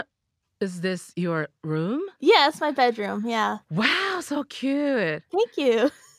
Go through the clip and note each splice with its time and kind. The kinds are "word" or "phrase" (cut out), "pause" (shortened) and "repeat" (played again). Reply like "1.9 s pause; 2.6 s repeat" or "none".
2.2 s pause